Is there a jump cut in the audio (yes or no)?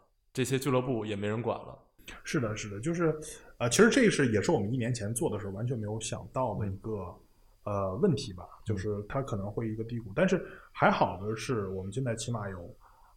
no